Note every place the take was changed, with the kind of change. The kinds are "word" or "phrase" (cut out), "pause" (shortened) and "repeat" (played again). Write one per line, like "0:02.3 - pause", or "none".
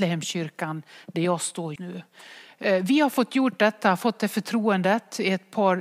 0:01.8 - word